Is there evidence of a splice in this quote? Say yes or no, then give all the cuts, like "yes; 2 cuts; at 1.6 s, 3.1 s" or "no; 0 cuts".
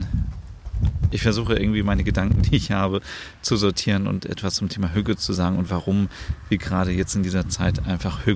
no; 0 cuts